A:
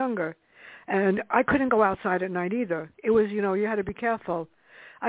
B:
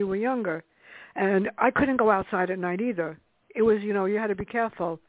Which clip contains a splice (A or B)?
A